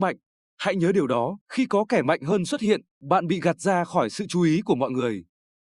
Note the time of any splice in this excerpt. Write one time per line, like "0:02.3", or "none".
0:01.4
0:02.9